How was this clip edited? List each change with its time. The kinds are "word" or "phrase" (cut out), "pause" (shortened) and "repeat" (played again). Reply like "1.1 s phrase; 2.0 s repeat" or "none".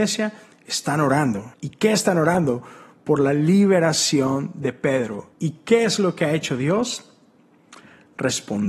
1.5 s pause; 5.3 s pause